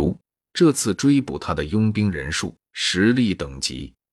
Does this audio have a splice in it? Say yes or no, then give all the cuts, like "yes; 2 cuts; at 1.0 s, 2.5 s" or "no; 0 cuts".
yes; 1 cut; at 2.7 s